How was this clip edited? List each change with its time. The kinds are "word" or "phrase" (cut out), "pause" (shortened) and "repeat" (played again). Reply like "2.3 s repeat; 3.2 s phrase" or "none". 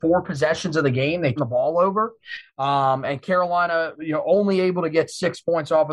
1.4 s word